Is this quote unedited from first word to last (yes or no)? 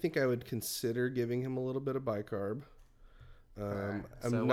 yes